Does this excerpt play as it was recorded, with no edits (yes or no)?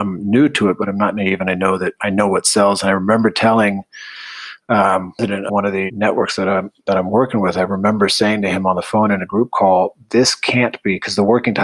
no